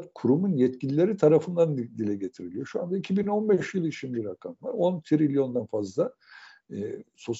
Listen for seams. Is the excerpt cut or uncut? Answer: uncut